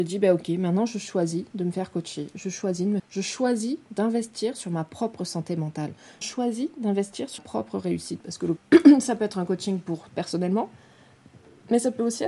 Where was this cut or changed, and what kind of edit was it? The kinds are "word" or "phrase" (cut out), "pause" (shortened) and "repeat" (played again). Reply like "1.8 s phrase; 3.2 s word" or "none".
3.0 s phrase; 6.2 s word; 7.4 s word; 8.6 s word; 10.1 s phrase

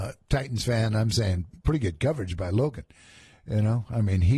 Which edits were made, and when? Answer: none

